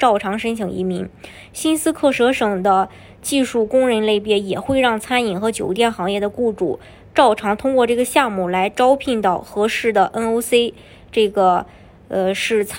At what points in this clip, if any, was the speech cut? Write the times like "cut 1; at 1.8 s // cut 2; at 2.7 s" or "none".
none